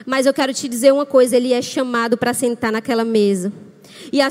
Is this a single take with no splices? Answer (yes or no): yes